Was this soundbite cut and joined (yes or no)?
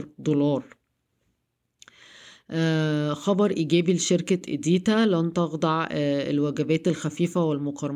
no